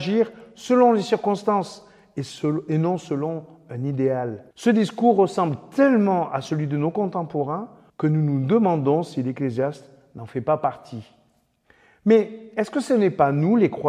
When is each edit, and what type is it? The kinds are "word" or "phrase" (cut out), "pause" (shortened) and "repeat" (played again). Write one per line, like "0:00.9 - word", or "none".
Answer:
0:04.5 - pause
0:07.9 - pause